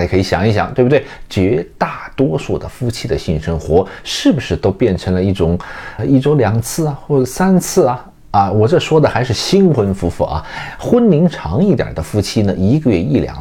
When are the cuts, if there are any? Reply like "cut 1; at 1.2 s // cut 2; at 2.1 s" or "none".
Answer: cut 1; at 6.0 s